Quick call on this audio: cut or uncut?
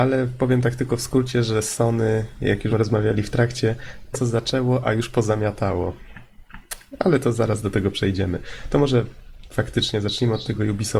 cut